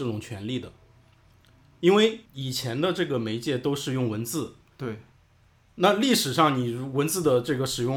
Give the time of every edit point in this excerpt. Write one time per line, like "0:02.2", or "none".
0:02.3